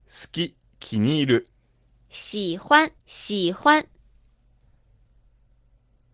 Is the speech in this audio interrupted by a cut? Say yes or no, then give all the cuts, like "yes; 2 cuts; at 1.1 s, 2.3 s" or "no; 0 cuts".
yes; 1 cut; at 3.0 s